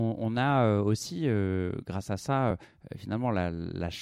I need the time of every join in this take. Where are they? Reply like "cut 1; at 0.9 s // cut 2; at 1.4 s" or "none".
none